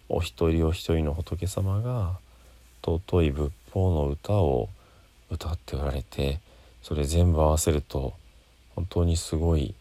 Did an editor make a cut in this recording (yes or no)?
no